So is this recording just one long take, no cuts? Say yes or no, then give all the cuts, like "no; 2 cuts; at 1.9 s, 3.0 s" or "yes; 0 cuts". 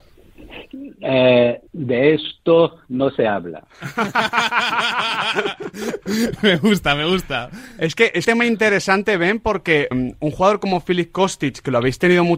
no; 3 cuts; at 1.7 s, 8.2 s, 9.9 s